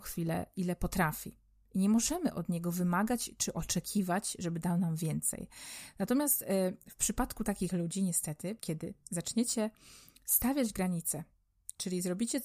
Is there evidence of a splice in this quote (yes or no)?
yes